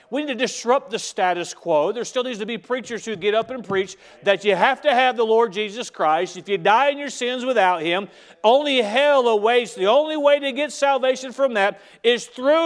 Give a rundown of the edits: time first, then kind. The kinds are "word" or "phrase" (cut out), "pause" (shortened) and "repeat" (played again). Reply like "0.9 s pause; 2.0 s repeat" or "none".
none